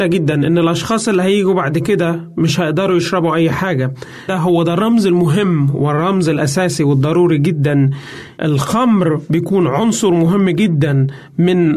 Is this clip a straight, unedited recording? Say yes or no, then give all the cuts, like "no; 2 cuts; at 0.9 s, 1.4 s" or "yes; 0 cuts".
no; 1 cut; at 4.3 s